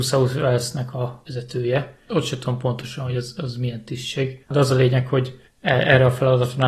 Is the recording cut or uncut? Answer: uncut